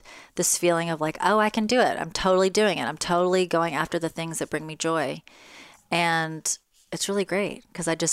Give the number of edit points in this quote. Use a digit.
0